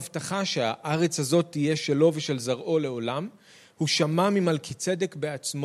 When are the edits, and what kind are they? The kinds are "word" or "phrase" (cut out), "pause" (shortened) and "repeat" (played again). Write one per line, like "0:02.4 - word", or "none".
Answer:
none